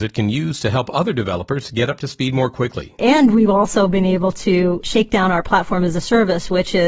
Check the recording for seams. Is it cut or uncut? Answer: uncut